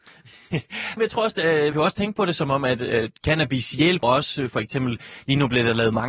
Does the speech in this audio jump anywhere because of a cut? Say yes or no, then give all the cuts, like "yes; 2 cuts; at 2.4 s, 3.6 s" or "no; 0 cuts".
yes; 3 cuts; at 1.0 s, 1.7 s, 4.0 s